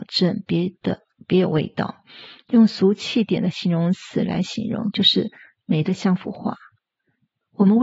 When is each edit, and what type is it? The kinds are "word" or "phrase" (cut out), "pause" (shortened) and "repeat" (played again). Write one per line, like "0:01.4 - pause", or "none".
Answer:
none